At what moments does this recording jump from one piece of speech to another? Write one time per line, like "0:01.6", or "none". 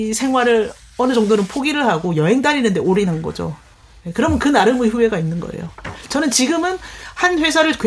none